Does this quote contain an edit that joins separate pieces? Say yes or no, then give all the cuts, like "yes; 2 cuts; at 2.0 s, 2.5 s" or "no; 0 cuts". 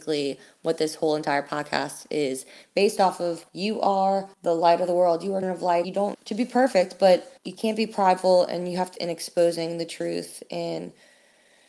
yes; 7 cuts; at 3.5 s, 4.3 s, 5.4 s, 5.8 s, 6.1 s, 7.4 s, 9.0 s